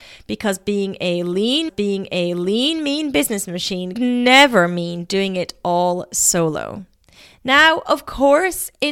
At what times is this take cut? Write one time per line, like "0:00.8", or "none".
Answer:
0:01.7
0:03.9

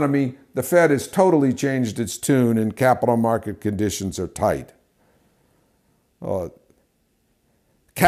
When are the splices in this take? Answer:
none

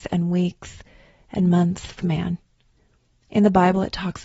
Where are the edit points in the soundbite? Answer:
0:02.0

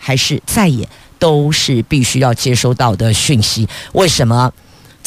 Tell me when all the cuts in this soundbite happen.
none

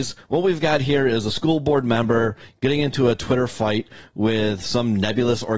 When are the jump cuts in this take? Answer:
none

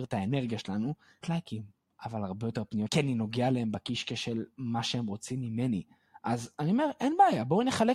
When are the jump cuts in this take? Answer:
0:01.2
0:02.9

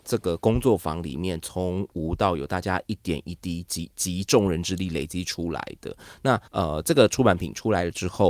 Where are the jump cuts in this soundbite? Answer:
0:06.5

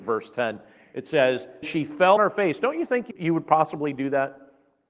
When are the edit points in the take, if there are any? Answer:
0:01.6
0:02.2
0:03.1

